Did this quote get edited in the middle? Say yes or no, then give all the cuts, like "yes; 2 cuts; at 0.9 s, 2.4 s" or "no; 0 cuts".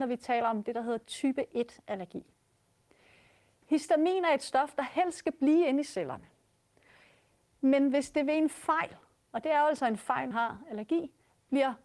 yes; 1 cut; at 10.3 s